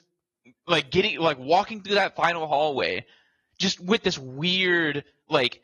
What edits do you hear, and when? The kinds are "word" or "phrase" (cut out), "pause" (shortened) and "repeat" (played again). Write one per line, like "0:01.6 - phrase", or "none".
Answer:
none